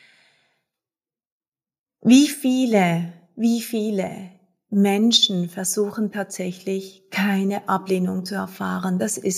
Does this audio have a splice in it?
no; 0 cuts

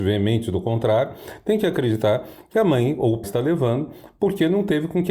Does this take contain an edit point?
yes; 1 cut; at 3.2 s

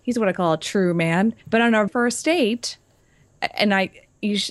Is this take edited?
yes; 2 cuts; at 1.4 s, 1.9 s

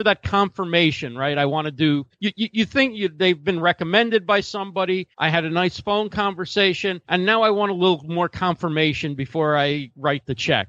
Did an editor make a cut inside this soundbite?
yes; 3 cuts; at 2.1 s, 5.1 s, 7.0 s

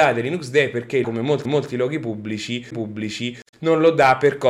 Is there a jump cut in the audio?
yes; 3 cuts; at 1.0 s, 1.4 s, 2.7 s

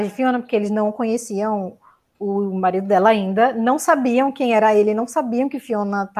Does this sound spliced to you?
no; 0 cuts

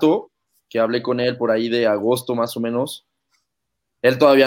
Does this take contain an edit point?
no; 0 cuts

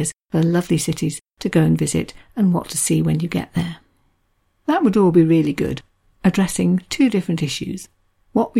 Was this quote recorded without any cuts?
yes; 0 cuts

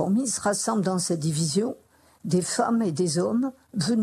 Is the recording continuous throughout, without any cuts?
yes; 0 cuts

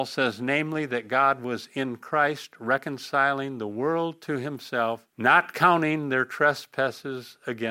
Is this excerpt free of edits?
no; 1 cut; at 5.1 s

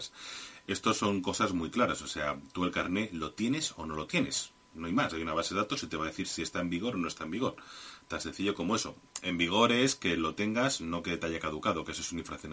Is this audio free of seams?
yes; 0 cuts

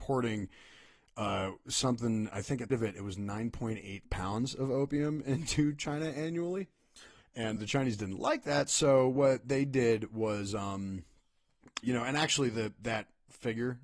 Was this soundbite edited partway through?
yes; 4 cuts; at 2.7 s, 4.0 s, 7.6 s, 11.8 s

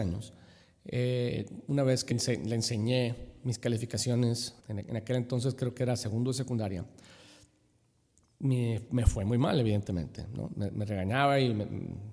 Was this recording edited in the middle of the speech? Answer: yes; 2 cuts; at 2.1 s, 4.6 s

